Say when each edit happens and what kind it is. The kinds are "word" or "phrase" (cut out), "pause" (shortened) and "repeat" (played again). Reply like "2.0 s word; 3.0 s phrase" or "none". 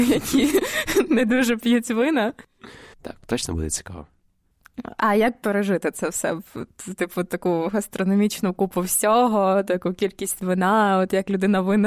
2.9 s pause